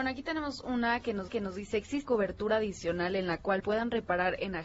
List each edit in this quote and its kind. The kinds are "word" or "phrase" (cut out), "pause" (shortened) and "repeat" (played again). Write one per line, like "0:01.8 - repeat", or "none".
0:01.3 - repeat
0:02.1 - word
0:03.6 - word